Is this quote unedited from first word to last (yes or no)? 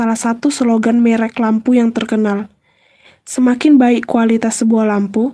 yes